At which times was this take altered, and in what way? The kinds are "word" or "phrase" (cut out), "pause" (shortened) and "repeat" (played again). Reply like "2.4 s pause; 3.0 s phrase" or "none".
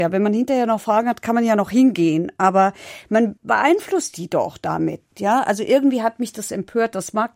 3.4 s pause